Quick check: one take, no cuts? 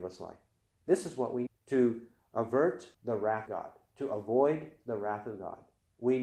no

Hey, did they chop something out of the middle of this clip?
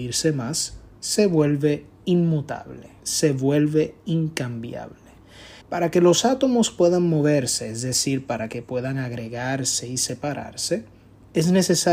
yes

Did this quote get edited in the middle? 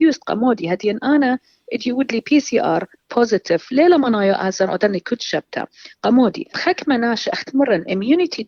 yes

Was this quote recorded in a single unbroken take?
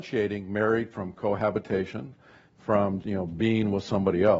no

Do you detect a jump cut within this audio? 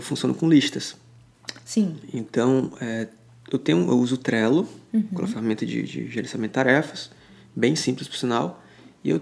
no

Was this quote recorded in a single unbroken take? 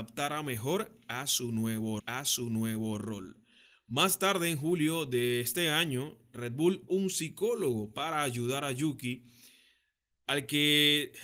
no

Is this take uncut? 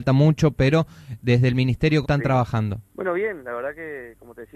no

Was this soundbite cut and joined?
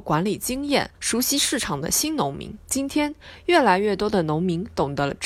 yes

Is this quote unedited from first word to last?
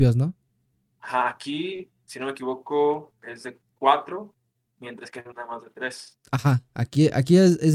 no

